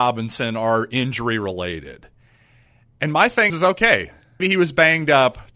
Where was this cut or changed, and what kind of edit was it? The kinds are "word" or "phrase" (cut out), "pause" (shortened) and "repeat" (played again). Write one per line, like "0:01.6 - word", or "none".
0:03.5 - word
0:04.4 - word

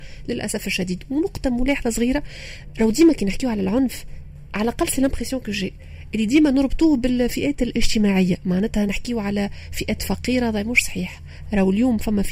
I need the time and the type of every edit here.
none

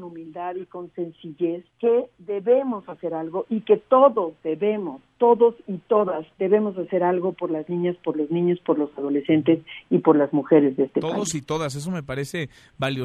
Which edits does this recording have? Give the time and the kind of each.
0:01.7 - pause
0:06.3 - pause

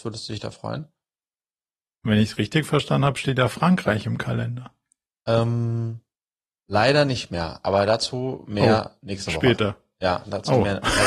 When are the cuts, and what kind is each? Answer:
none

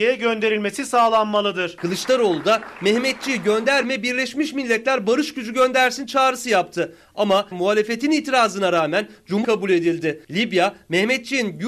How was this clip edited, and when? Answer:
0:02.8 - word
0:07.5 - word
0:09.4 - phrase

